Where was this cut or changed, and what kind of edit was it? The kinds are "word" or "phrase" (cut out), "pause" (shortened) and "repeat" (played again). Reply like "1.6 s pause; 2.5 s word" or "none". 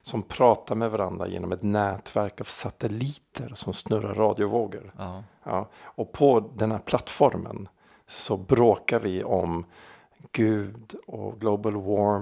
4.1 s phrase